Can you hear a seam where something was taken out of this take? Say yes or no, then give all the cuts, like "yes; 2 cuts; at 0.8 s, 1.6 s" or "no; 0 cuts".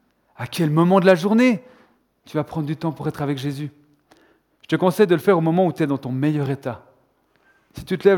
no; 0 cuts